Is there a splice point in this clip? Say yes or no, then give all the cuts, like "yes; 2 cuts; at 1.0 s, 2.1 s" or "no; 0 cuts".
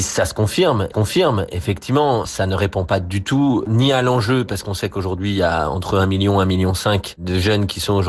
yes; 1 cut; at 0.9 s